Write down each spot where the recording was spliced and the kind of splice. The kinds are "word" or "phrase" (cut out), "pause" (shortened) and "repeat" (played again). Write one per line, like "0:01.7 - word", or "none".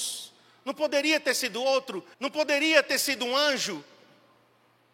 0:02.1 - pause

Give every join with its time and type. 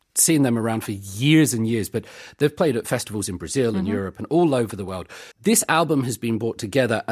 0:05.3 - pause

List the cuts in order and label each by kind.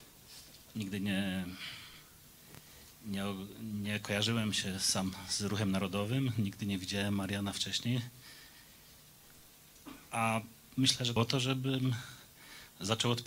0:11.2 - phrase

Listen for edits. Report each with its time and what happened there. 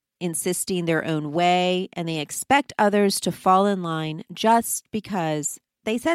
none

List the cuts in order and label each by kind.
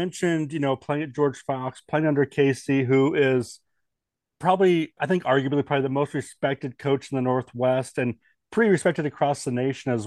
0:05.0 - word

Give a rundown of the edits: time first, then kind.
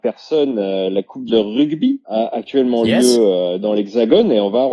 0:01.3 - word
0:02.0 - pause

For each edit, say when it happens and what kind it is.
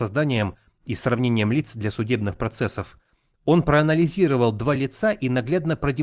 none

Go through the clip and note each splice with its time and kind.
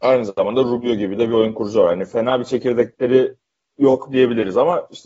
none

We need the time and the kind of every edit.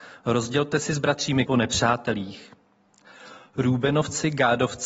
0:01.5 - word

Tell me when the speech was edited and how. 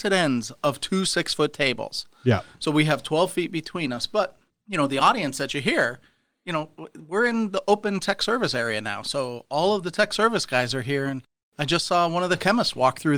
none

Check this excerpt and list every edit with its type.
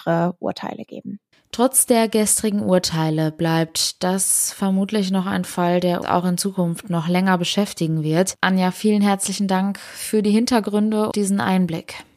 0:06.0 - word
0:11.1 - word

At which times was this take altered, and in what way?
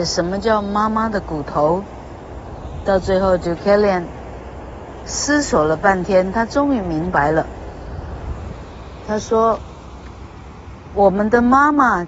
none

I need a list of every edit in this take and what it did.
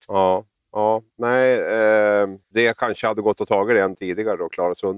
0:02.4 - pause
0:03.9 - word

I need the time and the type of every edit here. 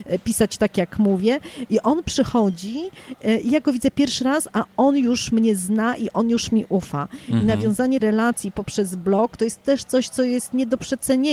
0:08.0 - word

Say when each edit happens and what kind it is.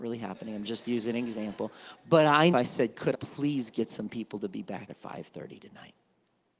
0:02.5 - phrase
0:03.1 - word
0:04.9 - word

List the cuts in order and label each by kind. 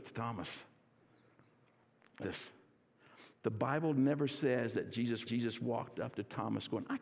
0:02.2 - word
0:05.2 - repeat

